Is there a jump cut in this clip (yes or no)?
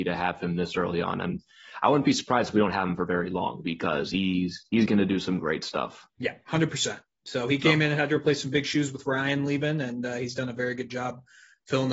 yes